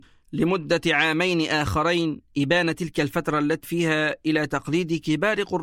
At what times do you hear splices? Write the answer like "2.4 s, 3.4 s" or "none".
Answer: 3.6 s